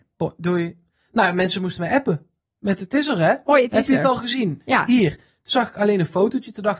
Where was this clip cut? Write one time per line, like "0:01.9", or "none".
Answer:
none